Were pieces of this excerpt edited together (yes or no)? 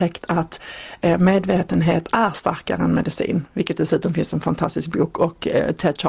no